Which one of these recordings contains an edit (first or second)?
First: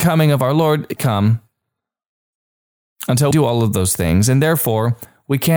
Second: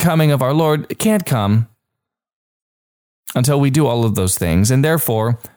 first